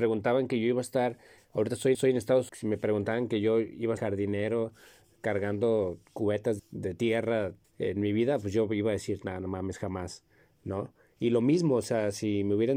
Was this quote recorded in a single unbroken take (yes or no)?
no